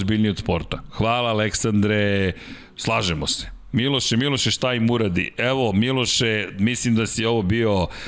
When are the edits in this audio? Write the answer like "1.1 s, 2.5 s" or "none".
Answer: none